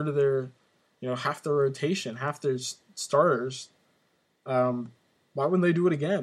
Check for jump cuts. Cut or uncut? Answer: uncut